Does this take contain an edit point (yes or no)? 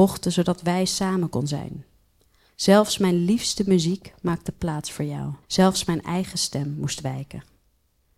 yes